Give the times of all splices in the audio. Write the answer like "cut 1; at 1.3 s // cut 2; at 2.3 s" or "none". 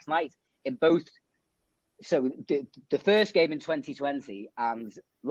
none